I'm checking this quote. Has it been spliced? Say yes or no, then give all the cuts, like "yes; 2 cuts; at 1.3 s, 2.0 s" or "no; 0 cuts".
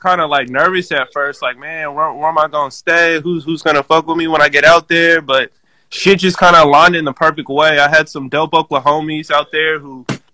no; 0 cuts